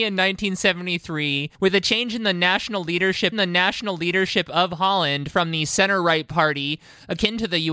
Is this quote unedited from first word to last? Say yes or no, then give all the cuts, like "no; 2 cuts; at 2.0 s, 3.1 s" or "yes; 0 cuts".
no; 2 cuts; at 1.5 s, 3.3 s